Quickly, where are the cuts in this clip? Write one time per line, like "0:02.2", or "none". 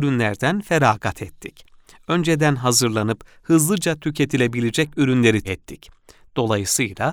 0:05.4